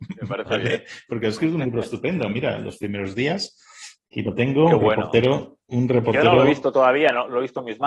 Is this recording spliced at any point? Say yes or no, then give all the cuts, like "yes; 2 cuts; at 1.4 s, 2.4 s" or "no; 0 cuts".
no; 0 cuts